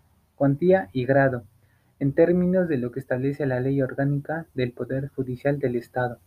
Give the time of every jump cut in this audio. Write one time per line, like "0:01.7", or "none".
none